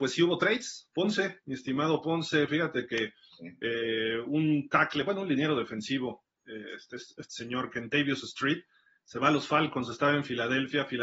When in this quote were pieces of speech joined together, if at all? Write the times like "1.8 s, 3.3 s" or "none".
none